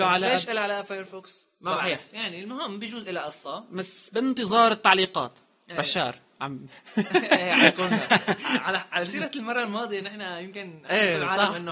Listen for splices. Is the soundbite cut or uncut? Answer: uncut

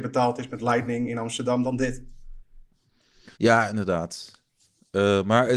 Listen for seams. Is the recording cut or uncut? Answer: cut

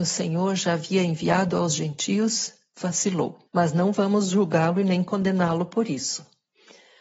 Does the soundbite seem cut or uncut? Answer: cut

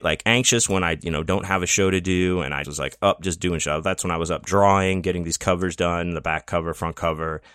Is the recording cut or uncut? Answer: cut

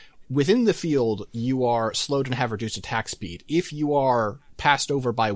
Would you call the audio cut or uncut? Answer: uncut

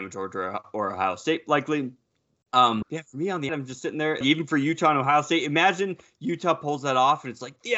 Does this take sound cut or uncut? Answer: cut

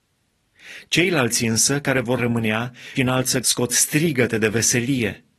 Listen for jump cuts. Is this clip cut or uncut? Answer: cut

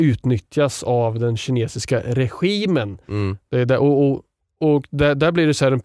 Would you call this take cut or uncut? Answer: uncut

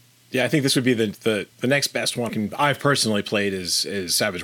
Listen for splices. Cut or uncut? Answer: cut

